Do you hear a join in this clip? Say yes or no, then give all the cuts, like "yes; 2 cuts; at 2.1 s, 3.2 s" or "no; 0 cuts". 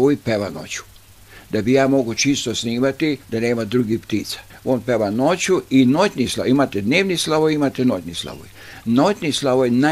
yes; 2 cuts; at 3.2 s, 4.5 s